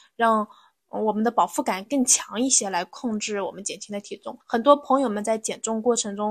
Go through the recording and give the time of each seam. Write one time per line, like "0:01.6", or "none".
0:04.4